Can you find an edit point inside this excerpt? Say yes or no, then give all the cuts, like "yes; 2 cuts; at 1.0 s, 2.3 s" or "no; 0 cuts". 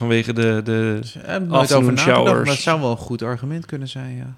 no; 0 cuts